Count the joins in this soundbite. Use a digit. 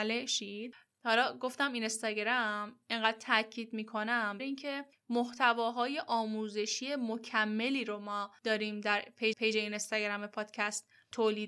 2